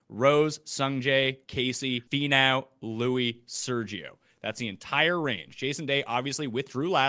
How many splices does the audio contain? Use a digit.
2